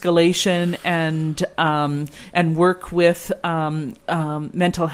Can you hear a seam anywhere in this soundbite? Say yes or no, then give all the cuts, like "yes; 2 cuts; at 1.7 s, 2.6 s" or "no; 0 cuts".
no; 0 cuts